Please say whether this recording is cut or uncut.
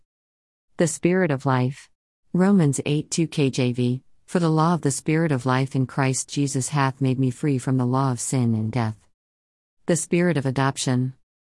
cut